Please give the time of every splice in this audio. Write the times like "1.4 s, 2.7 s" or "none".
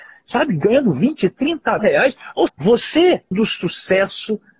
1.8 s, 2.5 s, 3.3 s